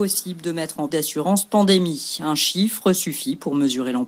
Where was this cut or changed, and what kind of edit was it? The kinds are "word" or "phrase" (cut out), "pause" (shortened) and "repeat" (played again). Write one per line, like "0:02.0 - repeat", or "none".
0:00.9 - phrase